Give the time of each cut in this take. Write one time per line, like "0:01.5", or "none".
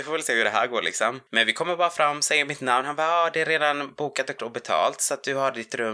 0:04.4